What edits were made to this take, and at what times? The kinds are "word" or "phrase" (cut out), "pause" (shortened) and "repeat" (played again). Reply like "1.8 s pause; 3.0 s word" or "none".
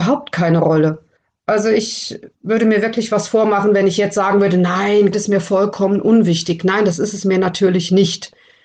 1.2 s pause; 2.3 s pause; 5.1 s word

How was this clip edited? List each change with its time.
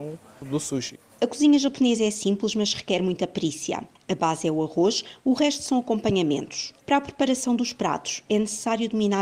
none

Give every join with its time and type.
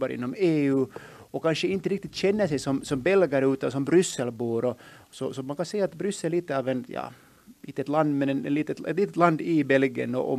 none

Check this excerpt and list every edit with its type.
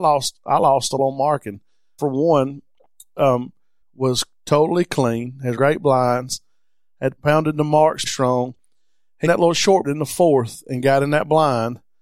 1.0 s word; 2.0 s word; 3.8 s word; 5.6 s word; 7.2 s word; 8.1 s word; 9.3 s word; 9.8 s word

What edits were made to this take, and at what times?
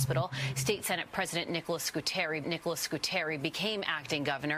2.4 s repeat

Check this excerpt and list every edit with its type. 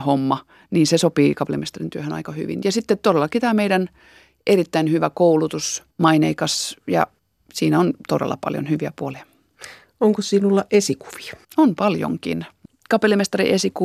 5.9 s pause; 7.2 s pause; 11.4 s pause

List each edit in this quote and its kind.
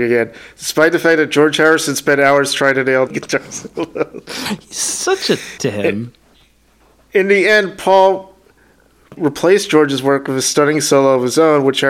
3.1 s word; 5.6 s word; 9.2 s word

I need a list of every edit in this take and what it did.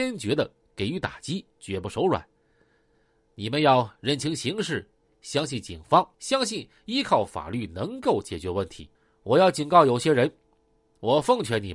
1.5 s pause; 6.1 s pause; 8.9 s pause

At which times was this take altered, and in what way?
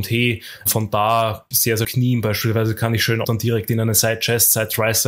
1.5 s phrase; 1.8 s phrase; 3.2 s phrase

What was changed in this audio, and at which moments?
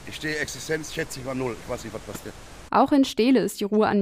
none

